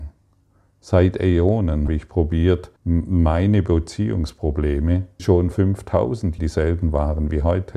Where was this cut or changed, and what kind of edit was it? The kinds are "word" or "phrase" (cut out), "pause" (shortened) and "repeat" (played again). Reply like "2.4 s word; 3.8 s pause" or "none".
1.9 s word; 2.8 s pause; 5.2 s word; 5.5 s word; 6.4 s word